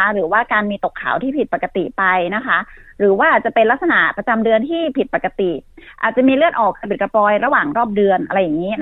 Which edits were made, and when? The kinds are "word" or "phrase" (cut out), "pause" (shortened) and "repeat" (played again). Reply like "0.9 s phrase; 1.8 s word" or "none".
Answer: none